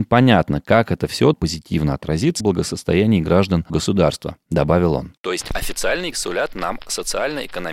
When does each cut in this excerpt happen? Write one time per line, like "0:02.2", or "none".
0:01.3
0:02.4
0:03.7
0:06.1